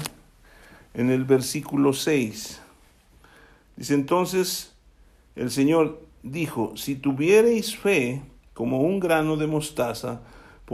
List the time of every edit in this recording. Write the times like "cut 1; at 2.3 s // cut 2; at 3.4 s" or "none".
none